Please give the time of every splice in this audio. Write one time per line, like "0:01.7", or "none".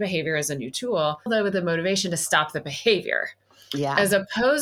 0:01.3

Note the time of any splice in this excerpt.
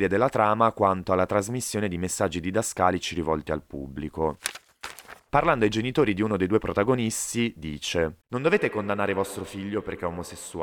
0:08.2

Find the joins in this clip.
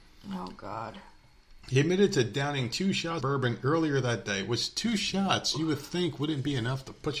0:03.2

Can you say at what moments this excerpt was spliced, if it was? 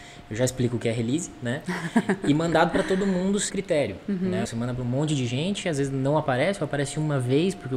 0:03.5
0:04.4

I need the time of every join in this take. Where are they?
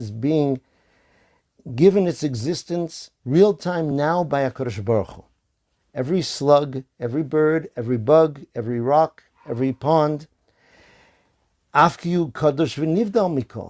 none

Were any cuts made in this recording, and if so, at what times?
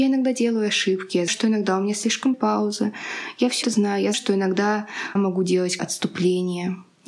0:01.3
0:02.3
0:03.6
0:04.1
0:05.2
0:05.8

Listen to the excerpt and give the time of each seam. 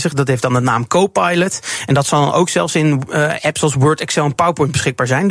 none

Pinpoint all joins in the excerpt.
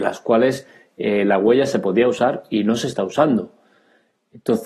none

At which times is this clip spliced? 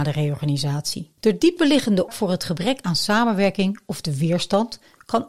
0:01.2
0:02.1

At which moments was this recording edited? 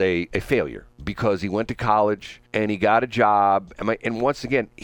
0:00.9
0:02.4
0:03.7

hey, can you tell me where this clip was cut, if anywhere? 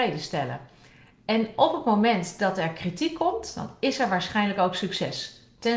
none

